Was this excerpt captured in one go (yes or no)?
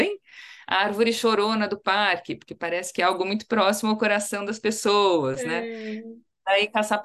yes